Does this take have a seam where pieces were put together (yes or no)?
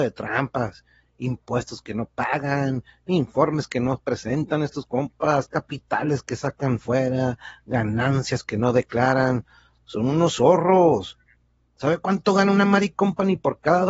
no